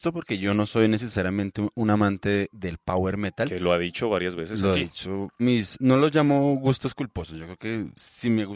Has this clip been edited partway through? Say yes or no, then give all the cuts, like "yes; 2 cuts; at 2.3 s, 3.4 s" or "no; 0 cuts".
yes; 1 cut; at 5.4 s